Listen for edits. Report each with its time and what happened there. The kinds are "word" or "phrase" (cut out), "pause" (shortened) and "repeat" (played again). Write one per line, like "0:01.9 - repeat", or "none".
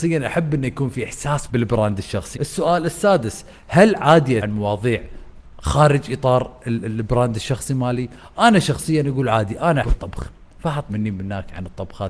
0:01.5 - word
0:02.3 - word
0:04.4 - word
0:09.8 - word
0:10.9 - word